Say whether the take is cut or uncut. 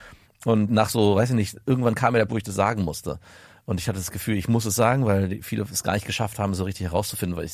cut